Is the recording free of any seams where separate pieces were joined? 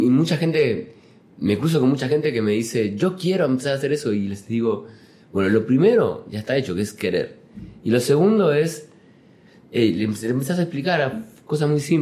yes; 0 cuts

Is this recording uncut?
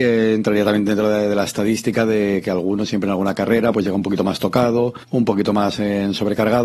no; 1 cut; at 5.0 s

